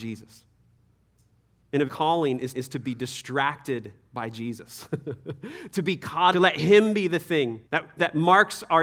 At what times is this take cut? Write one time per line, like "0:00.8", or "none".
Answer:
0:01.9
0:02.5
0:06.3
0:07.7